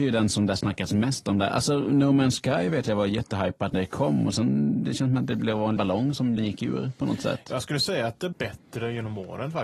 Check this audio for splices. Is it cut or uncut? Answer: cut